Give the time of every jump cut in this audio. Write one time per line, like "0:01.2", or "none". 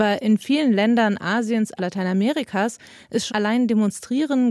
0:01.8
0:03.3